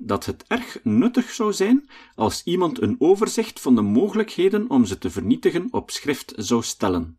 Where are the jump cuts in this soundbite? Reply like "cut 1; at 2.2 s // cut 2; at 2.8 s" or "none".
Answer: none